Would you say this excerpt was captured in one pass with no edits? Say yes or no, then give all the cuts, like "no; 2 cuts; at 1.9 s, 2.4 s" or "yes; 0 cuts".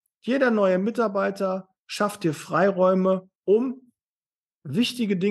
no; 1 cut; at 3.4 s